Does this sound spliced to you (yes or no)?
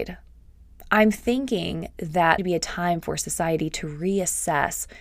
yes